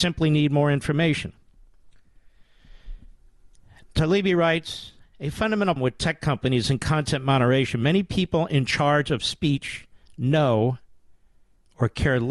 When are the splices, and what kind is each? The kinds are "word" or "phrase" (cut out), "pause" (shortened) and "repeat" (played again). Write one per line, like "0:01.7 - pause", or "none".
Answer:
0:05.8 - word